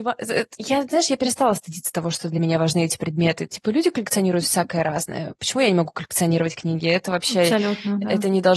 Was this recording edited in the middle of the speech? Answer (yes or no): no